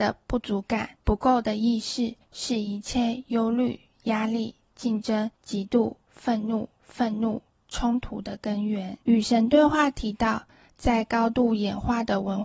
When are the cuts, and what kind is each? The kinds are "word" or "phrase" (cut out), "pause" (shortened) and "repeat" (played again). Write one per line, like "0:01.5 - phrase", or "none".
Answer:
0:01.0 - pause
0:02.2 - pause
0:05.4 - pause
0:06.8 - repeat
0:09.0 - pause